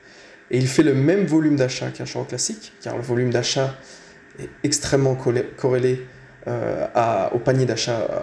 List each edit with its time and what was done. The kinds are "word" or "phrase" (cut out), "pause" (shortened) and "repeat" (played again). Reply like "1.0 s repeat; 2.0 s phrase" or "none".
none